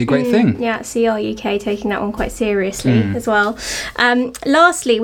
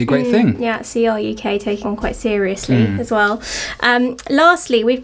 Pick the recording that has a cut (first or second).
second